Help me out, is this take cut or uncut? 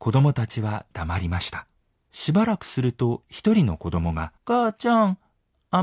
cut